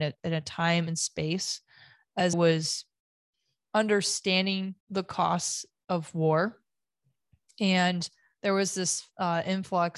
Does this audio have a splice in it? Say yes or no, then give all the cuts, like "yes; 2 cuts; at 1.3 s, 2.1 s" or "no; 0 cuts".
yes; 2 cuts; at 2.3 s, 4.8 s